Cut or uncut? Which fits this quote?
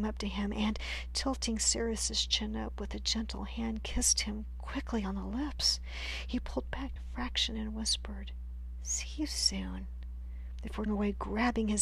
cut